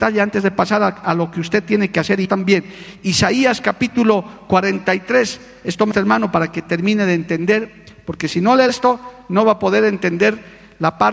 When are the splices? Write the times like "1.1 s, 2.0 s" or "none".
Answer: 2.2 s, 5.9 s, 8.7 s